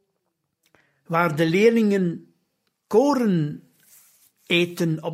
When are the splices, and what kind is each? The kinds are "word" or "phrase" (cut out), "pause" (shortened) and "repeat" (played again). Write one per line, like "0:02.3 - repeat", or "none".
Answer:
0:02.7 - pause